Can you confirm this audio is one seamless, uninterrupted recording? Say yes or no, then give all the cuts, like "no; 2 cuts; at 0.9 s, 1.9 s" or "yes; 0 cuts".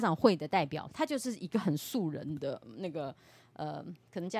yes; 0 cuts